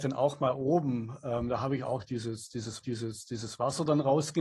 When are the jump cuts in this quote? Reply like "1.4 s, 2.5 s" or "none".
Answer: 2.8 s